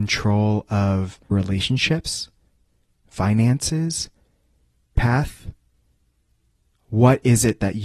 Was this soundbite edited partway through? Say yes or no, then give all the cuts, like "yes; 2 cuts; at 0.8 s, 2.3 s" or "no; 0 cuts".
yes; 2 cuts; at 1.3 s, 5.0 s